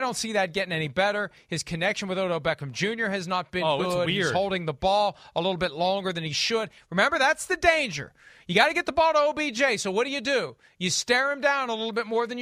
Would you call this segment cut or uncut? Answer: uncut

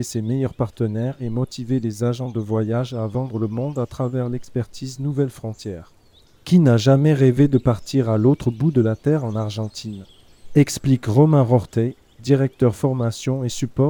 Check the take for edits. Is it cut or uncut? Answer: uncut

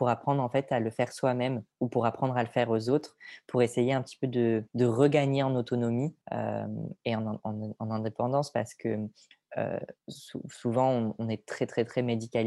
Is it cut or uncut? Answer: cut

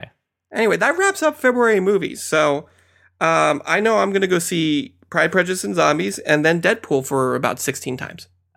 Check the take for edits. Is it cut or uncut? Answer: uncut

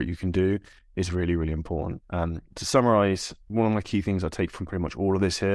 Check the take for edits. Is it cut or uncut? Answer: cut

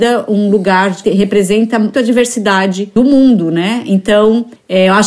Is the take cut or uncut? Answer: cut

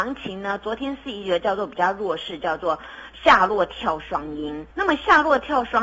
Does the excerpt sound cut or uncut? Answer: cut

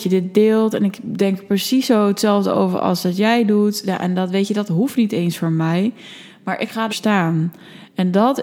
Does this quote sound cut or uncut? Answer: cut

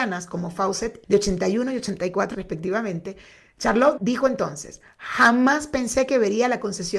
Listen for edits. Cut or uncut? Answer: cut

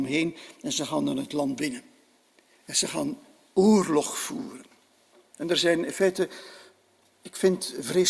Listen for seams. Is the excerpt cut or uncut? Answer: uncut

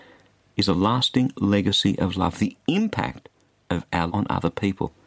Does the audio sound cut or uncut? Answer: cut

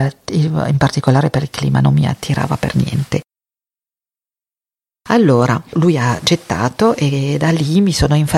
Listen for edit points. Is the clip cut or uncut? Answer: uncut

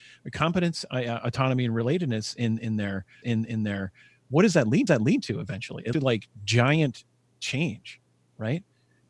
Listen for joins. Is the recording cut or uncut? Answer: cut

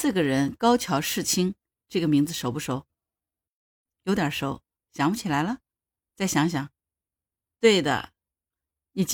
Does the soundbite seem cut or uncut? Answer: uncut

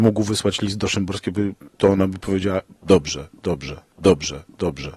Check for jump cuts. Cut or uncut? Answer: cut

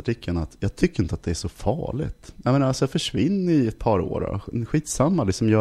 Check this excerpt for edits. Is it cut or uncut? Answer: uncut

